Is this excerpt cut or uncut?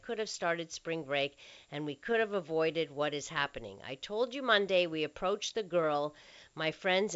uncut